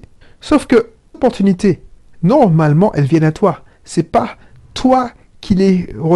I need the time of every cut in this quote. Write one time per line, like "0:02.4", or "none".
0:01.1